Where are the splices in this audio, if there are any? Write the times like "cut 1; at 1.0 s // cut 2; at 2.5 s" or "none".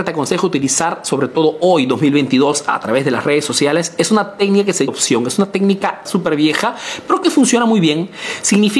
cut 1; at 4.9 s // cut 2; at 6.1 s